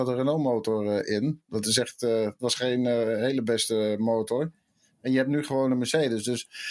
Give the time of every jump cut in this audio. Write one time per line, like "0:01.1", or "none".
none